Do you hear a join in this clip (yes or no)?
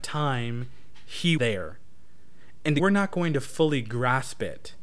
yes